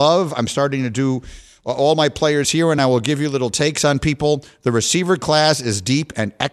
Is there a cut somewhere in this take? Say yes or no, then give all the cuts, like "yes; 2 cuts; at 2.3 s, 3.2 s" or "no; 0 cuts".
no; 0 cuts